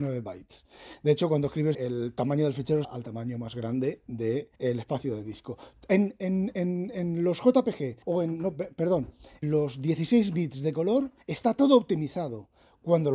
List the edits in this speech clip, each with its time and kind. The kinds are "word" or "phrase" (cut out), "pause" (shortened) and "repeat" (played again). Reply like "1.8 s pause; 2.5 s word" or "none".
1.7 s phrase; 2.8 s phrase; 4.5 s pause; 8.0 s pause; 9.4 s word; 11.2 s pause